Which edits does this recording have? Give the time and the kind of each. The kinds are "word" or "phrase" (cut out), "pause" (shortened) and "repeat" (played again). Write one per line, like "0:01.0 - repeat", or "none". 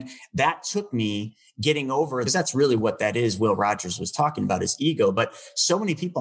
0:02.3 - phrase